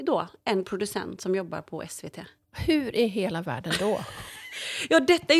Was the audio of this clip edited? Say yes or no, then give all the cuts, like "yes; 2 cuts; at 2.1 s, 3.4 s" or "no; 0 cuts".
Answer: no; 0 cuts